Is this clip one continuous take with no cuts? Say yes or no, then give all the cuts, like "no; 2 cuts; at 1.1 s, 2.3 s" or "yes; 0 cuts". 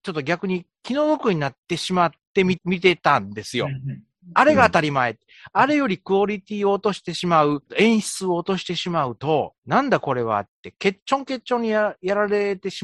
no; 2 cuts; at 1.6 s, 9.6 s